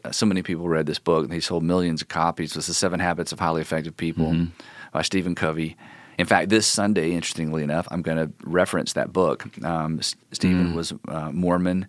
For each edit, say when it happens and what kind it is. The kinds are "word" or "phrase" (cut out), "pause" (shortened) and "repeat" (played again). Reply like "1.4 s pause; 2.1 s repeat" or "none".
none

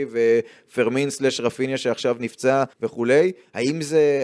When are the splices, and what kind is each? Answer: 2.7 s pause

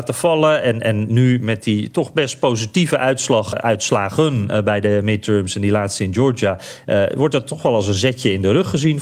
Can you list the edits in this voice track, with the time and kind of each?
3.5 s word

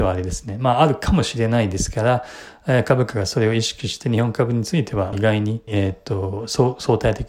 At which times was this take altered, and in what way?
5.1 s phrase; 5.7 s phrase

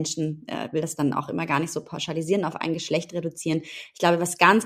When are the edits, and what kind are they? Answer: none

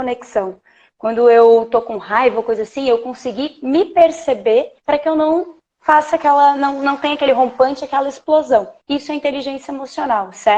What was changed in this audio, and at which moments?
4.8 s pause; 8.8 s pause

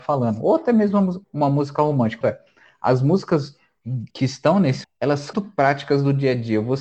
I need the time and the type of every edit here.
1.2 s pause; 2.2 s phrase; 4.1 s pause; 4.8 s word; 5.3 s phrase

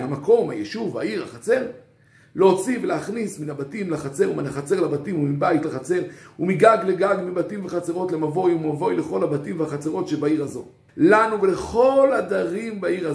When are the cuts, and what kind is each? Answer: 5.6 s phrase; 10.9 s pause

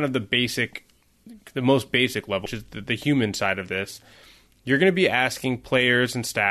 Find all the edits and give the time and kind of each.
2.5 s word

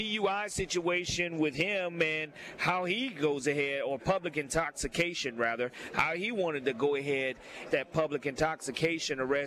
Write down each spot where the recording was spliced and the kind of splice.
7.7 s phrase

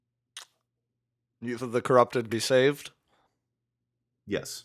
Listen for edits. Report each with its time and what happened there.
1.6 s word; 2.3 s word

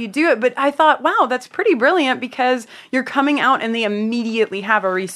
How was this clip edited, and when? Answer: none

